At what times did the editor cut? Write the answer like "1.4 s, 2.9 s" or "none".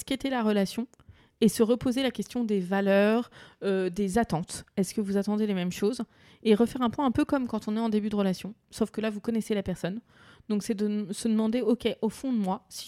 none